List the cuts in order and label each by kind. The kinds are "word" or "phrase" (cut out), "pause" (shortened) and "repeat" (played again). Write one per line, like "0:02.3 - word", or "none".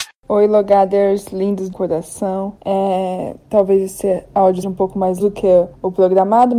0:01.7 - word
0:04.6 - word
0:05.2 - word